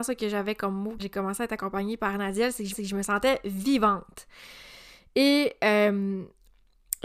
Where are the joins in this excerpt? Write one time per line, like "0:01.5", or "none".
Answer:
0:01.0
0:02.7